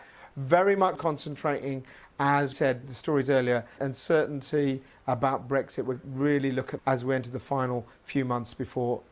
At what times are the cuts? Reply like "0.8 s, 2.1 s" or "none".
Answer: 1.0 s, 2.5 s, 2.8 s, 3.8 s, 6.0 s, 6.8 s